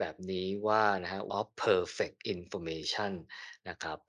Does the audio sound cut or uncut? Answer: cut